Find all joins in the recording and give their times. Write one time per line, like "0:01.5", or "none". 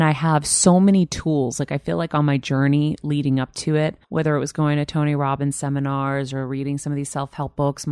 0:04.0